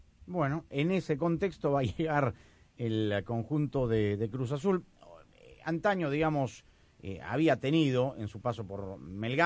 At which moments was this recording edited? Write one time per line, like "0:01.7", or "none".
none